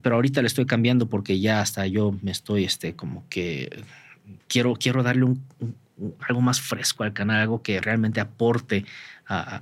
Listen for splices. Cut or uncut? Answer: cut